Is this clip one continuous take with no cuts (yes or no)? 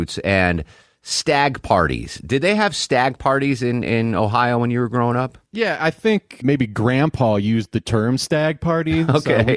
no